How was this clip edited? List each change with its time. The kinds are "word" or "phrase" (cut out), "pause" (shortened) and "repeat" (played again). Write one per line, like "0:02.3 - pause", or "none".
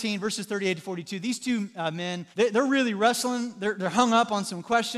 0:02.3 - pause